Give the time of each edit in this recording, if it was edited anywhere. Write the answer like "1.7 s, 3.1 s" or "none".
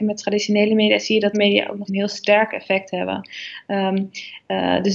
1.3 s, 1.9 s

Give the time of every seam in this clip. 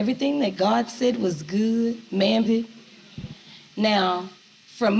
2.4 s

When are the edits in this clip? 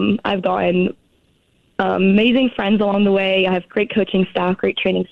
none

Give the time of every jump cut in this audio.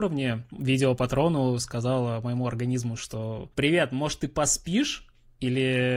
none

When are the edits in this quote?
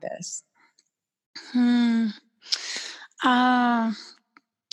none

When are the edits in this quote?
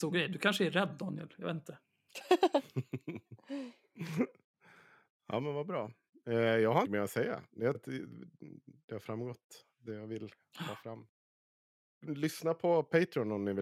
6.8 s, 7.7 s

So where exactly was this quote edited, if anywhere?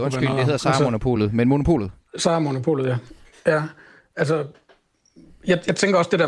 none

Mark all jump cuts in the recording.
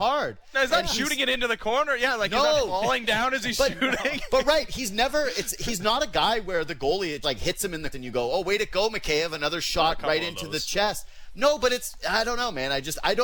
7.2 s, 7.9 s

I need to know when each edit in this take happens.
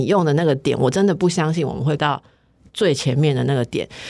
2.0 s

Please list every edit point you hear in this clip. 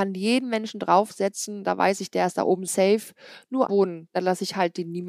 2.7 s, 3.7 s

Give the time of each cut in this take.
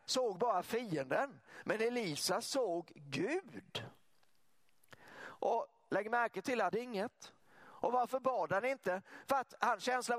6.7 s, 7.4 s

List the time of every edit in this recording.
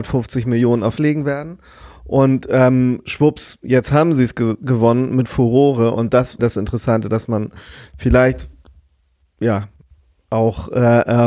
1.0 s, 4.6 s, 6.4 s

